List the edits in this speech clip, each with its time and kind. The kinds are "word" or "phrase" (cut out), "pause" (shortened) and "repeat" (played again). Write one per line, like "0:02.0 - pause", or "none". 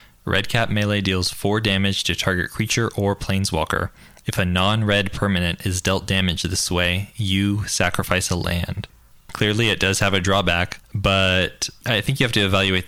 none